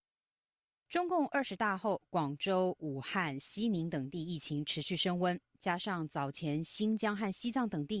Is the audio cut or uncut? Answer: uncut